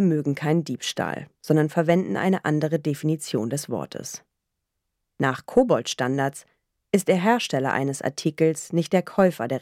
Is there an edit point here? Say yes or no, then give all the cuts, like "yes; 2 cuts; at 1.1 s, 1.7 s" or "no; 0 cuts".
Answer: no; 0 cuts